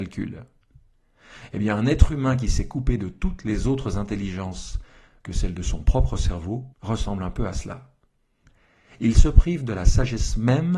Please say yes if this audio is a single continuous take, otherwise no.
no